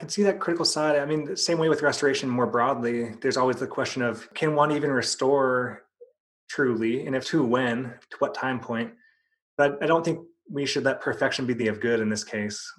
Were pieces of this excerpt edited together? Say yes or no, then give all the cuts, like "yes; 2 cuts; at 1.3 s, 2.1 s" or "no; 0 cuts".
yes; 2 cuts; at 7.2 s, 11.6 s